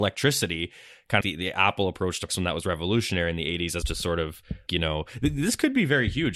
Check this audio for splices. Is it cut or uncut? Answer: cut